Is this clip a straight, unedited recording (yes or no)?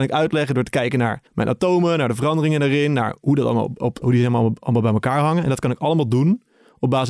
no